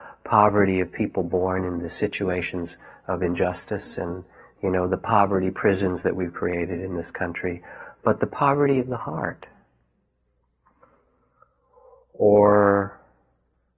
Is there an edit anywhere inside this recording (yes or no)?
no